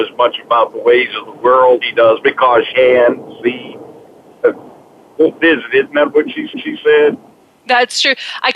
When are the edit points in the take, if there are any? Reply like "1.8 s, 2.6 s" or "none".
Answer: 1.8 s, 2.7 s, 6.5 s